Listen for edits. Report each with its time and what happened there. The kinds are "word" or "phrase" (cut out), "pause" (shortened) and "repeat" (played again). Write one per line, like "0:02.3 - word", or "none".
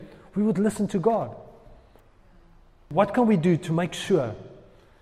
none